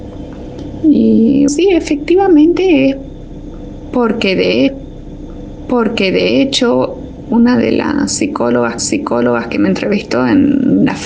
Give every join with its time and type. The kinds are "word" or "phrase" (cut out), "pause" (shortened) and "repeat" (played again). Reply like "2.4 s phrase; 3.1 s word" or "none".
1.5 s word; 4.7 s repeat; 8.8 s repeat